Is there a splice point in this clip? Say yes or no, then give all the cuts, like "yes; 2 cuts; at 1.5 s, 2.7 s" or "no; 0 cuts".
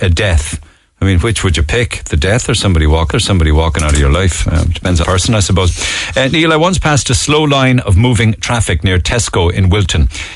yes; 2 cuts; at 3.1 s, 5.0 s